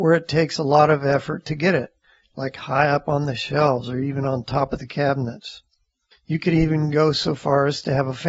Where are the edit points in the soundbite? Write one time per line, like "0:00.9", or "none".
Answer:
none